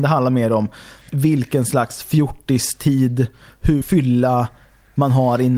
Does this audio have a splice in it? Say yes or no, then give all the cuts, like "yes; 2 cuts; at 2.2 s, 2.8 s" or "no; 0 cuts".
yes; 2 cuts; at 1.1 s, 3.8 s